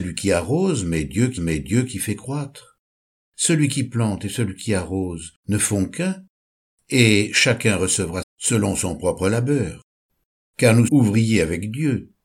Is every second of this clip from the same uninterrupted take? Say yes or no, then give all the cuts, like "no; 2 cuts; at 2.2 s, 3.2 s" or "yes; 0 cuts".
no; 4 cuts; at 1.4 s, 5.4 s, 8.2 s, 10.9 s